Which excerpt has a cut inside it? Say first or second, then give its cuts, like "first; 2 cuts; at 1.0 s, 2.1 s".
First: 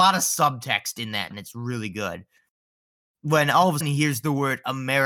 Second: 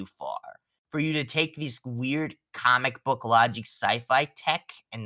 first; 2 cuts; at 1.3 s, 3.8 s